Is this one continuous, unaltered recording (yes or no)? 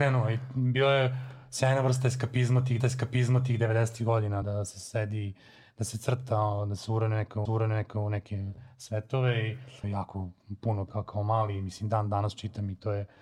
no